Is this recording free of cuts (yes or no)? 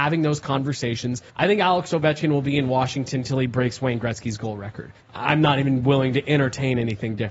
no